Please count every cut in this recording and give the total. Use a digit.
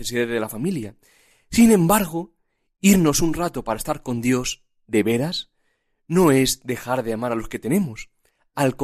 0